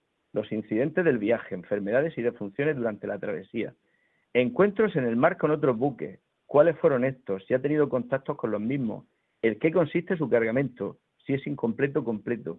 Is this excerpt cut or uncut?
uncut